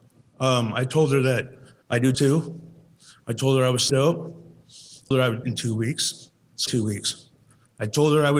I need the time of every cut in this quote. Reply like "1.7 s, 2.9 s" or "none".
1.8 s, 2.1 s, 3.9 s, 5.1 s, 5.4 s, 6.7 s